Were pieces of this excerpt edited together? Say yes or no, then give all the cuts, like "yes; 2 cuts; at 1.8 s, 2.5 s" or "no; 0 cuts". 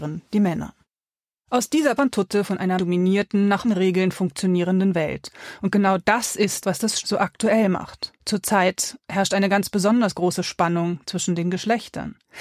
yes; 6 cuts; at 2.0 s, 2.8 s, 3.6 s, 6.6 s, 7.0 s, 8.2 s